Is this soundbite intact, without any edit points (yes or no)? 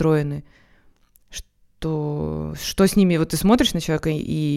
yes